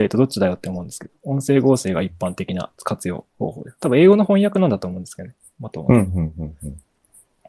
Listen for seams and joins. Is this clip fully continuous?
no; 2 cuts; at 2.7 s, 3.3 s

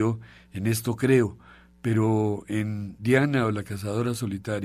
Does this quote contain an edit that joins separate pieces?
no; 0 cuts

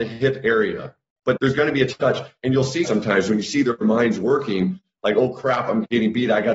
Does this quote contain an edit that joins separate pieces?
yes; 2 cuts; at 1.4 s, 2.8 s

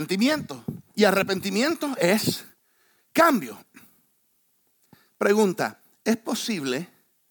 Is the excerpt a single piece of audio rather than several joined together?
yes; 0 cuts

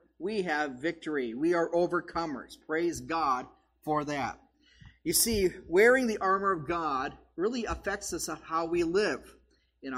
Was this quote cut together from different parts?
no; 0 cuts

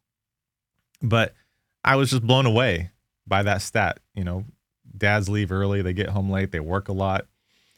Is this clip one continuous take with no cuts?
yes; 0 cuts

